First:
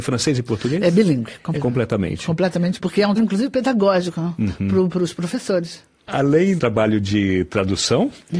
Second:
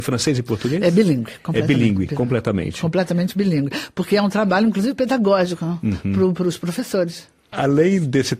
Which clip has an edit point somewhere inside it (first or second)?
first